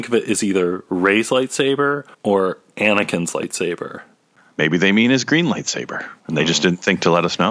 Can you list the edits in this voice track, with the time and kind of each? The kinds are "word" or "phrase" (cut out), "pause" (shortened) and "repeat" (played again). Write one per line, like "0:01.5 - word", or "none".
0:02.1 - pause
0:06.2 - pause